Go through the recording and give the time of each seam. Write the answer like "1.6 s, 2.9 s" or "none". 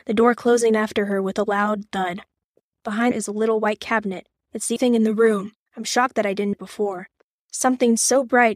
3.1 s, 4.8 s, 6.5 s